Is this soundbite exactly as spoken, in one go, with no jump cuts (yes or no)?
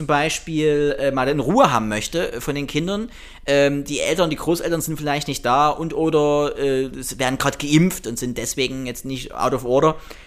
yes